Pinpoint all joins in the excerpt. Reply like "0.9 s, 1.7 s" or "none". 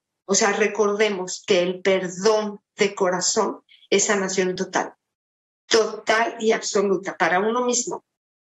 none